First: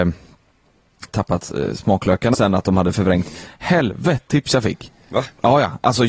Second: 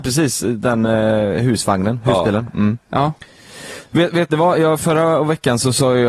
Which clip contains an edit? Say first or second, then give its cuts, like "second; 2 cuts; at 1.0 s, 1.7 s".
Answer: first; 3 cuts; at 1.1 s, 2.3 s, 4.3 s